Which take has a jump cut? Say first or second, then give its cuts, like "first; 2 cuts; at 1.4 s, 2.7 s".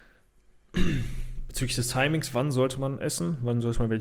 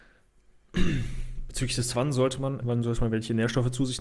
second; 2 cuts; at 1.9 s, 2.6 s